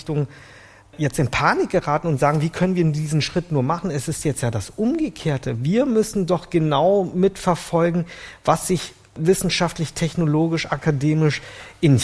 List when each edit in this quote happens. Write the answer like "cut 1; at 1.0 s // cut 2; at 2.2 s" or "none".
none